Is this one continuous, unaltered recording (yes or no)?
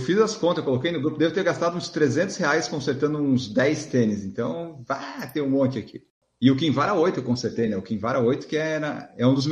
yes